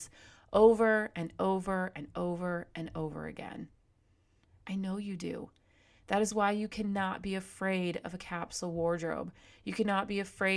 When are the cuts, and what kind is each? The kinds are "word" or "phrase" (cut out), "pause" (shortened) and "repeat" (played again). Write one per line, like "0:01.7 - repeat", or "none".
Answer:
none